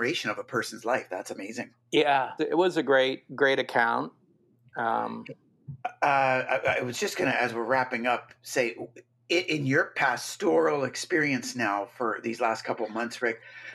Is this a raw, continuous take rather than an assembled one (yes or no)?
no